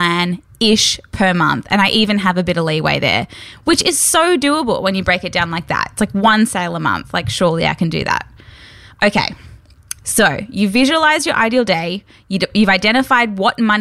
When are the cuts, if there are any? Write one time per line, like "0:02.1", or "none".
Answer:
none

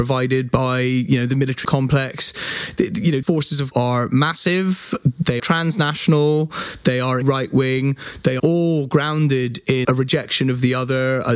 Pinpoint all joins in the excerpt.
0:01.6
0:03.2
0:03.7
0:05.4
0:07.2
0:08.4
0:09.8

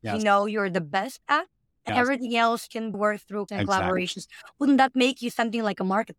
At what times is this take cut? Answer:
0:01.9
0:02.9
0:03.5

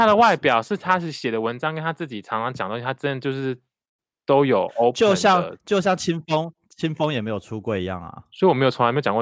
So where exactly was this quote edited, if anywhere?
none

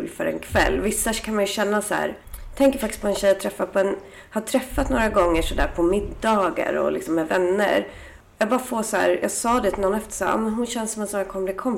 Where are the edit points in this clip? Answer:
0:02.2

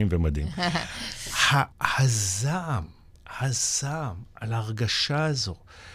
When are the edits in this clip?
0:01.7

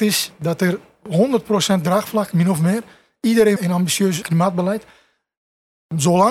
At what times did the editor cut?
0:02.3
0:03.6
0:04.2

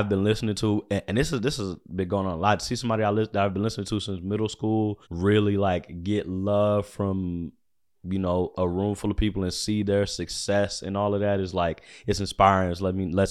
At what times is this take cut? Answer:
0:05.0

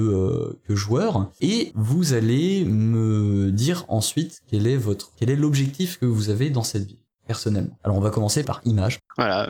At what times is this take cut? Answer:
0:05.1

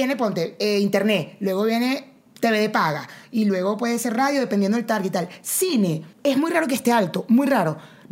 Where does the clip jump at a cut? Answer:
0:06.1

